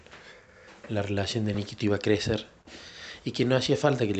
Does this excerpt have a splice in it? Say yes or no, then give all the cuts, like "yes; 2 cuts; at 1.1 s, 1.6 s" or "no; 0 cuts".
no; 0 cuts